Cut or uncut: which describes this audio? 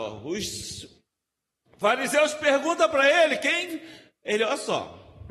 uncut